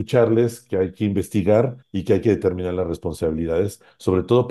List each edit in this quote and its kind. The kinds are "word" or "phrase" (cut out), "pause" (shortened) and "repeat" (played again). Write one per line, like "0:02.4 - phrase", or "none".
0:01.8 - pause

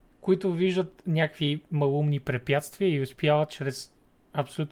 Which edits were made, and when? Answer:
none

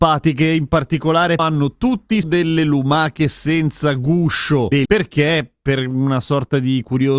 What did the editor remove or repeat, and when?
0:01.4 - word
0:02.2 - word
0:04.9 - word

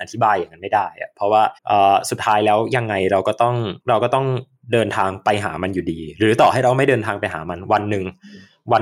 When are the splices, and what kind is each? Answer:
0:01.6 - pause
0:03.8 - pause

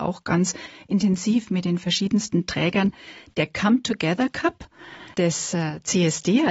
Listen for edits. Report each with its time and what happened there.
0:05.1 - pause

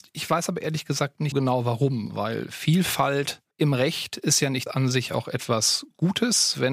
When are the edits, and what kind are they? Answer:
0:01.3 - word
0:03.5 - pause
0:04.7 - phrase

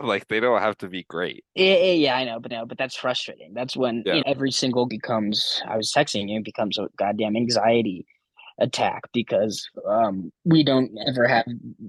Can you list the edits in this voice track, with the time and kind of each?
0:01.5 - pause
0:02.5 - repeat
0:04.2 - word
0:04.9 - word
0:06.9 - word
0:10.4 - pause

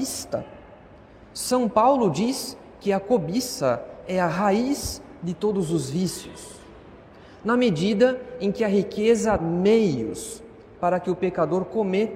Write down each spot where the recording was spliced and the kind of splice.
0:09.4 - word

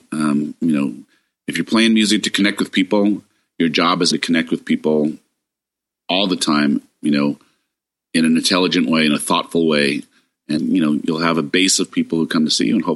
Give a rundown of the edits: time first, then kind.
0:04.1 - word
0:10.6 - word

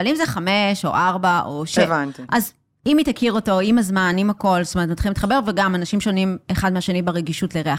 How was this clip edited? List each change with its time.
none

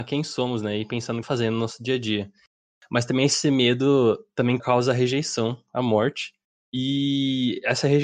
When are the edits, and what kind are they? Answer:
0:01.2 - phrase
0:04.6 - word

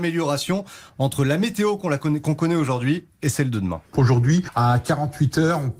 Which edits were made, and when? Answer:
0:03.9 - pause

